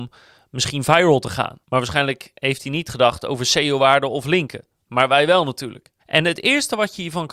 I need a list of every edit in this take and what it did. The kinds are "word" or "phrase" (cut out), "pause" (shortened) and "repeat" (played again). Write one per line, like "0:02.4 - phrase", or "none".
0:01.6 - pause
0:06.0 - pause